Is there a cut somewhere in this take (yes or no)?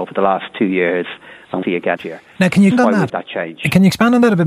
yes